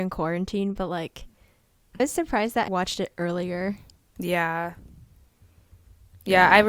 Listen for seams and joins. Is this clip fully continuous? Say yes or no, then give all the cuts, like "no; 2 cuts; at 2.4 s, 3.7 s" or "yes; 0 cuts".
no; 2 cuts; at 2.0 s, 2.7 s